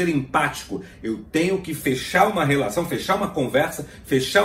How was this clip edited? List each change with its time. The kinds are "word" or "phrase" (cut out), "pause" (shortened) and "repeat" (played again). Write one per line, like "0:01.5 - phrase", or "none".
none

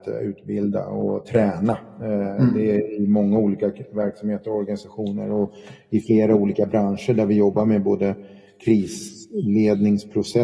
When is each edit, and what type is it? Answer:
none

